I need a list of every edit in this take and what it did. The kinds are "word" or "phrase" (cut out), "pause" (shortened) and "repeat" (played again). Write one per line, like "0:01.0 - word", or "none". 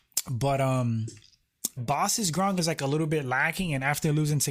0:01.8 - word
0:02.6 - word